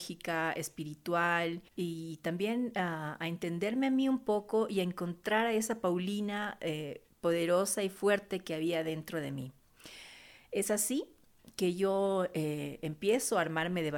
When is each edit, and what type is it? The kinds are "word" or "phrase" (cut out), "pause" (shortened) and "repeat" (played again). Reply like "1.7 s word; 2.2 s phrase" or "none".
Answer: 1.7 s pause; 7.1 s pause